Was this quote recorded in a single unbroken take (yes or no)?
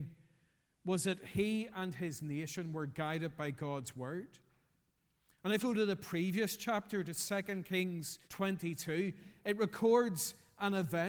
no